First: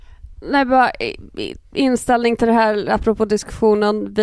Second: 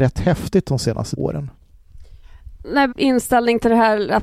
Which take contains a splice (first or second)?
second